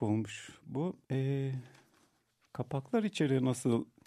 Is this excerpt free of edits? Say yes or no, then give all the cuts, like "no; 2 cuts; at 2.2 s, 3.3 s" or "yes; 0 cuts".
no; 1 cut; at 1.0 s